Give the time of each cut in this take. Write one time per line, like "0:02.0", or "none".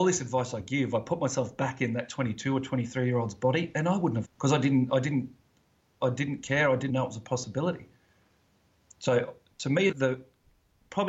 0:04.2
0:06.9
0:09.9